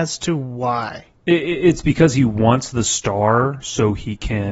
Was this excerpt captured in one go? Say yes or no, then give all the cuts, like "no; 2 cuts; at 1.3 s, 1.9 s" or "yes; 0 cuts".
no; 1 cut; at 1.2 s